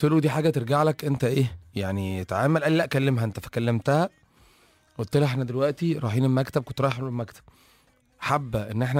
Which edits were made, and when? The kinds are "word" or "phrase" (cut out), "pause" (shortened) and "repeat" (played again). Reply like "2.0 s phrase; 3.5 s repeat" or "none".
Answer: none

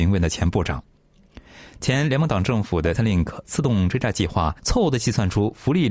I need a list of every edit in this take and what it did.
3.0 s phrase; 4.6 s pause

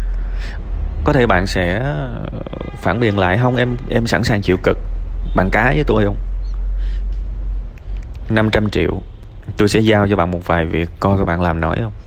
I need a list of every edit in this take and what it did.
none

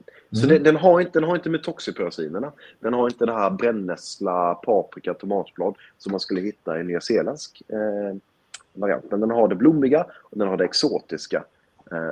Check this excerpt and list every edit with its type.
8.7 s word

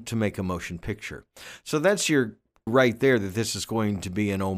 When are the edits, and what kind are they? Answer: 2.7 s word

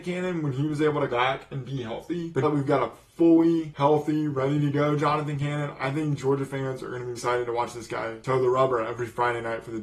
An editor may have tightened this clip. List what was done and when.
1.1 s word; 2.4 s word; 7.2 s word

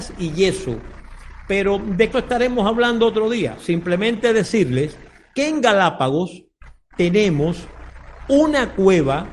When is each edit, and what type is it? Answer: 2.1 s word

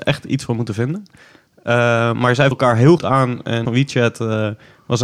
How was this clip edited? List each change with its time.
2.5 s word; 3.0 s word; 3.7 s phrase

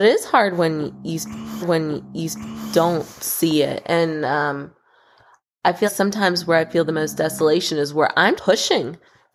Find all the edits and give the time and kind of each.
1.6 s repeat; 5.9 s word; 8.4 s word

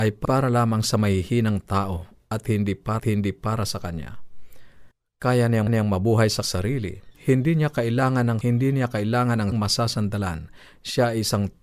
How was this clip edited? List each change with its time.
3.0 s repeat; 5.7 s repeat; 6.4 s word; 7.1 s pause; 8.4 s word; 9.5 s word

